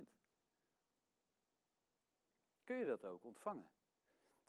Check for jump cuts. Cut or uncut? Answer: uncut